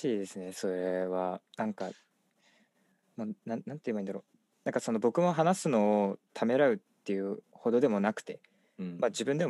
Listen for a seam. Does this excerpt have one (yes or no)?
yes